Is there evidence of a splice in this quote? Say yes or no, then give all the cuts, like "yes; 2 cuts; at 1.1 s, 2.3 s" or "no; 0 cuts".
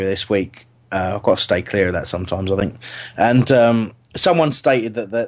no; 0 cuts